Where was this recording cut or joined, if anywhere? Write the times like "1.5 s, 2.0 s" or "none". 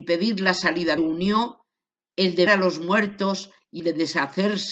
1.0 s, 2.5 s, 3.8 s